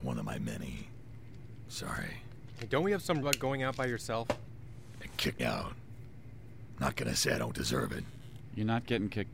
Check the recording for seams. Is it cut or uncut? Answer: cut